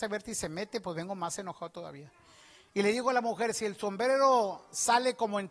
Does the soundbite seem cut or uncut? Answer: uncut